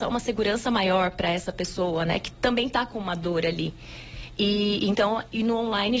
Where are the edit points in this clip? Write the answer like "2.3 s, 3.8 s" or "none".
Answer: none